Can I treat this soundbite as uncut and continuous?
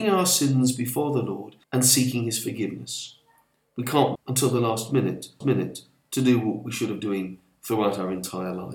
no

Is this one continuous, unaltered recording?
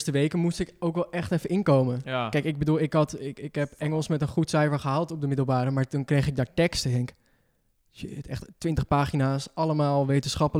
yes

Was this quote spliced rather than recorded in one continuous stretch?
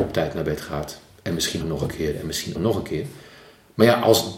yes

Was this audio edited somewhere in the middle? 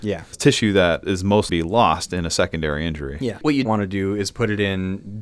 yes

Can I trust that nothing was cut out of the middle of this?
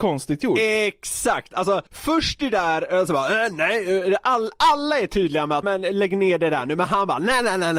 no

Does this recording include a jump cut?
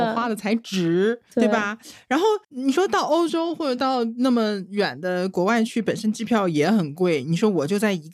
yes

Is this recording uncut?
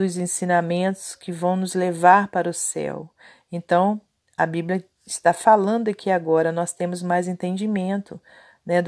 yes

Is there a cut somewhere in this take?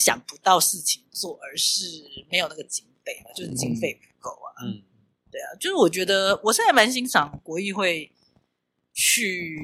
no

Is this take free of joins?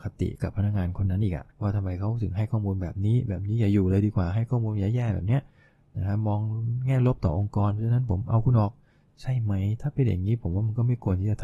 no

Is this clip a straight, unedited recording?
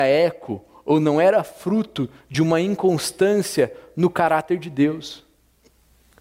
yes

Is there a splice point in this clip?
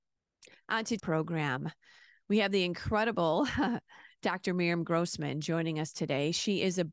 yes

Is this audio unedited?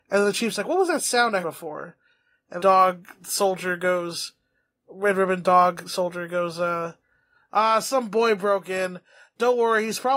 no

